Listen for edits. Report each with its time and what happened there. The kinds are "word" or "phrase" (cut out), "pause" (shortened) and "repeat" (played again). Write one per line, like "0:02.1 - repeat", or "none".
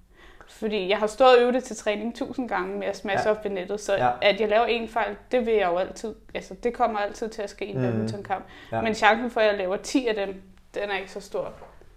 none